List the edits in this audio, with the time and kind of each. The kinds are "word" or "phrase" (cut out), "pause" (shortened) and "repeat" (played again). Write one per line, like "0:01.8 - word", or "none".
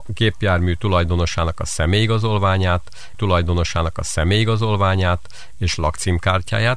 0:03.1 - repeat

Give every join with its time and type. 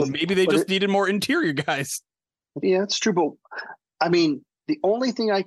0:02.6 - word

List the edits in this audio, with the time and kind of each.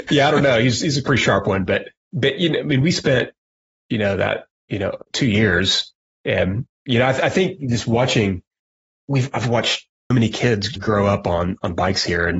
0:02.0 - word
0:04.6 - pause
0:10.1 - word
0:10.8 - word

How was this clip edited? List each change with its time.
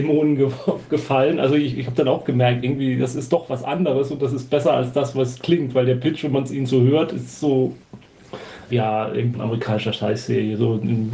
0:08.7 - word
0:09.3 - word

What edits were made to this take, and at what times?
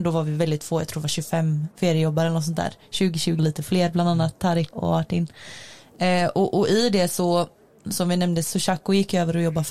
0:01.7 - pause
0:03.4 - word
0:04.7 - word
0:08.4 - word

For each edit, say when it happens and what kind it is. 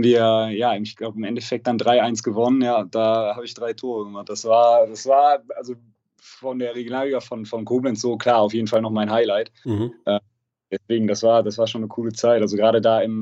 none

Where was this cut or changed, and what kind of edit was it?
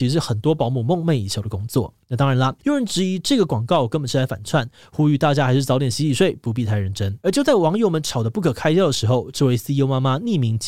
0:02.0 - pause
0:02.6 - pause
0:07.2 - pause

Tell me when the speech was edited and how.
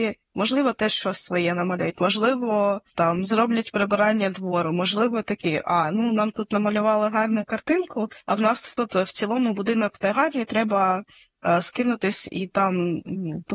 0:02.9 - pause
0:08.2 - pause

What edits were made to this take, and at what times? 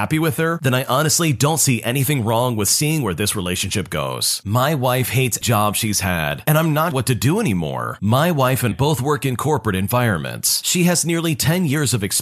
0:05.4 - word
0:06.9 - word
0:08.7 - word

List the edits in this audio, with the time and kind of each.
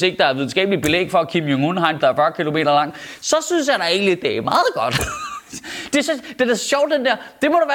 0:02.0 - word

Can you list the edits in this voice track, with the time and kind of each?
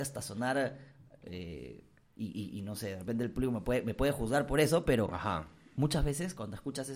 none

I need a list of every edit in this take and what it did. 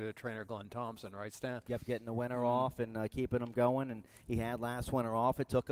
none

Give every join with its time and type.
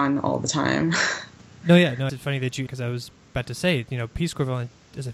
0:02.1 - word
0:02.7 - phrase

